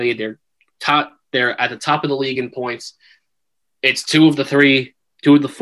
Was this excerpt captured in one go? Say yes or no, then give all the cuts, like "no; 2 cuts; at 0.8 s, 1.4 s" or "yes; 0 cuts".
yes; 0 cuts